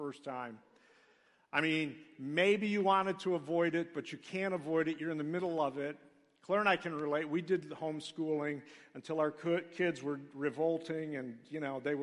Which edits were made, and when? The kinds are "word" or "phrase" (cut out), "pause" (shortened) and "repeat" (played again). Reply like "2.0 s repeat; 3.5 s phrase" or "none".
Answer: none